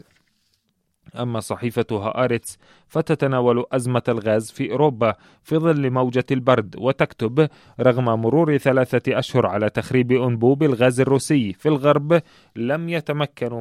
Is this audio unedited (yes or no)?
yes